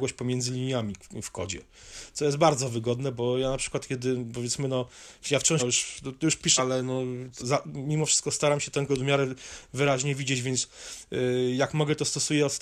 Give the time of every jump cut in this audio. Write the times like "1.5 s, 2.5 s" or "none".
5.6 s, 6.6 s, 7.4 s, 8.9 s

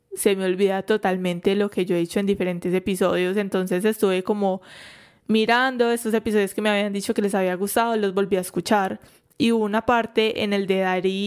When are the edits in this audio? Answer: none

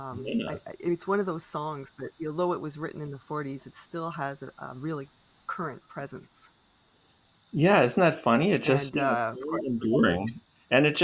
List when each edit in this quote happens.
none

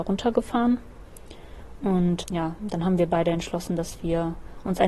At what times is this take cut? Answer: 2.2 s

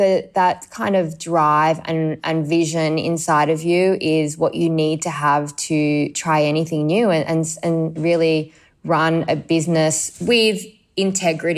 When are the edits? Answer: none

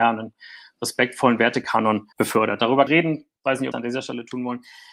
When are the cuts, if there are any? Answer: 2.1 s, 2.9 s, 3.7 s

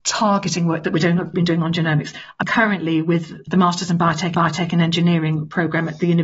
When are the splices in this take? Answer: 1.3 s, 2.4 s, 4.3 s

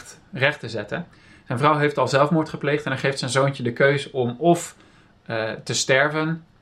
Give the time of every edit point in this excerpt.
none

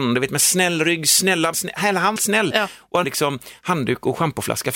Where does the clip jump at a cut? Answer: 1.5 s, 2.2 s, 3.0 s

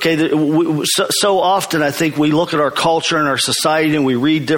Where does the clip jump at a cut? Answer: none

